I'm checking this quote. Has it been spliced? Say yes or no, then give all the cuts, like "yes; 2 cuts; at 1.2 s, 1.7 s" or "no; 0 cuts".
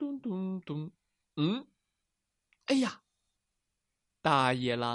no; 0 cuts